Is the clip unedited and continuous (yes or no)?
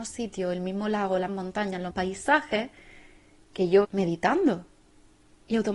no